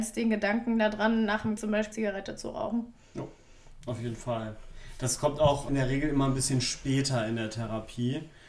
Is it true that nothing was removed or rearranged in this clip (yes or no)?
no